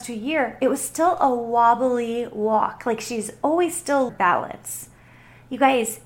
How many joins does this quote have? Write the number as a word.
one